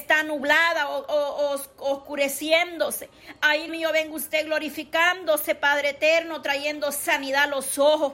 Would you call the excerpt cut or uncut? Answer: cut